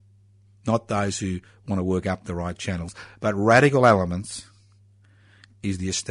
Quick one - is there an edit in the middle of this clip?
no; 0 cuts

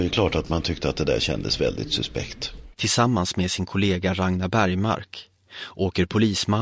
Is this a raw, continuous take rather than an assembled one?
no; 1 cut; at 2.7 s

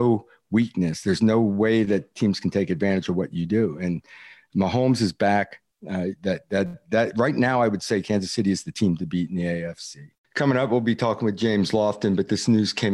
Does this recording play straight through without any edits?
yes; 0 cuts

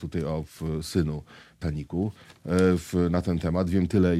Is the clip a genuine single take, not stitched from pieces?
no; 1 cut; at 1.6 s

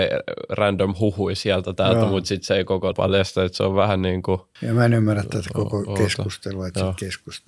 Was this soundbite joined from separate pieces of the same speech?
yes; 2 cuts; at 2.9 s, 4.6 s

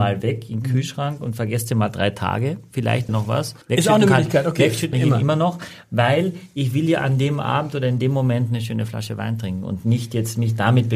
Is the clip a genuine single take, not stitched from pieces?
no; 3 cuts; at 3.1 s, 3.6 s, 4.9 s

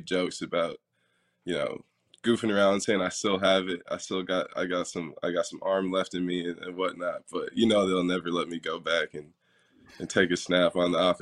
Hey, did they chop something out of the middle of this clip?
no; 0 cuts

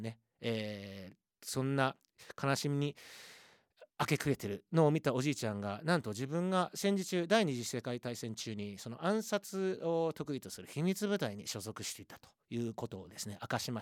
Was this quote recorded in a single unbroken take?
no; 1 cut; at 3.9 s

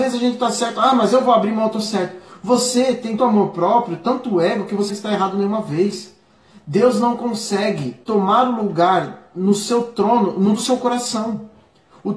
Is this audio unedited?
no; 4 cuts; at 3.2 s, 4.9 s, 8.0 s, 10.6 s

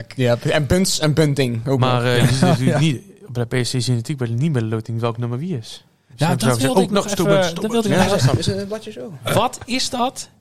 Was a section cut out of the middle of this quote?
no; 0 cuts

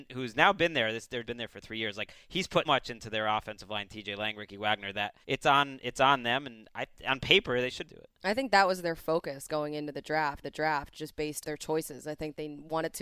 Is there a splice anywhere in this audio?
yes; 6 cuts; at 1.2 s, 2.6 s, 5.2 s, 7.9 s, 10.4 s, 11.4 s

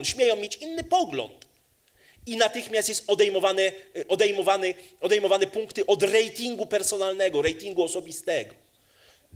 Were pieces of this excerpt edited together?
no; 0 cuts

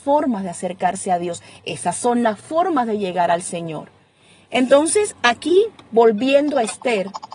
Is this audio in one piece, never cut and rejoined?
yes; 0 cuts

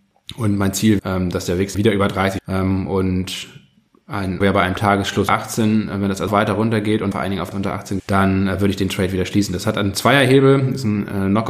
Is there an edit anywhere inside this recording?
yes; 9 cuts; at 1.0 s, 1.7 s, 2.4 s, 4.4 s, 5.3 s, 6.3 s, 7.1 s, 7.5 s, 8.0 s

